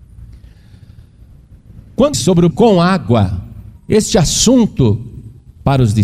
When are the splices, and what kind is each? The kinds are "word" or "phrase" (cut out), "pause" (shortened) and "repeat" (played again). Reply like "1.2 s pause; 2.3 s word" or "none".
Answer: 2.1 s phrase; 2.5 s word; 3.8 s pause